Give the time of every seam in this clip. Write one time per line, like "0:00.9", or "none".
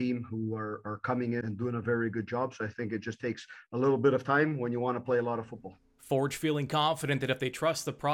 0:01.4